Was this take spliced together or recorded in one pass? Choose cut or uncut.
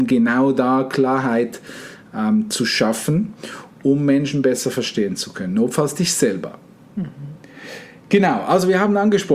uncut